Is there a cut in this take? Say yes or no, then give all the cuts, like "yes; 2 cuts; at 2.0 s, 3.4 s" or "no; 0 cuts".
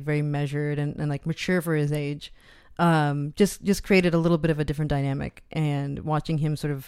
no; 0 cuts